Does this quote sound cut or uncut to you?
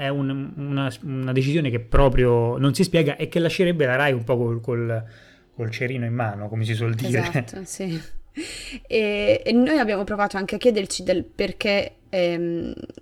uncut